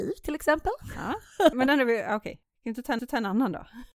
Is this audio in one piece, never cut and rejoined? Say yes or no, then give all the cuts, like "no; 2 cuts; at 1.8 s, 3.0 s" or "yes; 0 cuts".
no; 2 cuts; at 1.5 s, 3.0 s